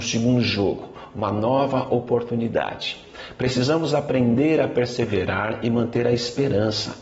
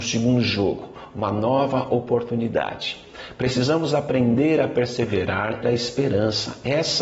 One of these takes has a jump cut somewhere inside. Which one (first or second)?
second